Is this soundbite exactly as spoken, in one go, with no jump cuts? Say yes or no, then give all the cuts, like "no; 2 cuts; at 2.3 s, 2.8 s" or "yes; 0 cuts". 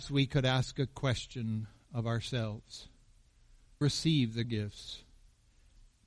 no; 2 cuts; at 3.8 s, 4.4 s